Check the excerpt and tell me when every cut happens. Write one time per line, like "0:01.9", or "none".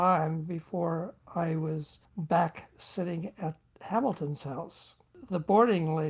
none